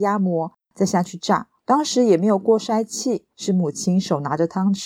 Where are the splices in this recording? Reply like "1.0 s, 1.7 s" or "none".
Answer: 1.6 s, 3.3 s